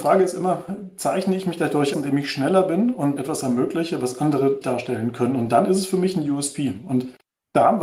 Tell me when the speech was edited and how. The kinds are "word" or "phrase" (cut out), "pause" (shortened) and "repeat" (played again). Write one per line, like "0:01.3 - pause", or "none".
0:01.9 - word
0:03.2 - word
0:04.6 - word